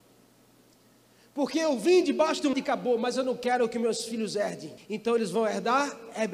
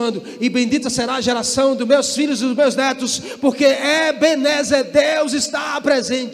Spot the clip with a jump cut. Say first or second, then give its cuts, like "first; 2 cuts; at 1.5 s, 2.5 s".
first; 2 cuts; at 2.5 s, 4.8 s